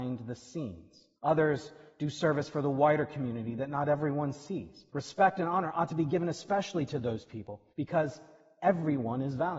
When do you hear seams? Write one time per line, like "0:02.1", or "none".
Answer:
0:01.2
0:04.9
0:07.7